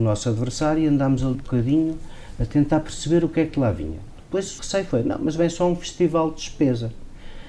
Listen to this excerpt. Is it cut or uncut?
cut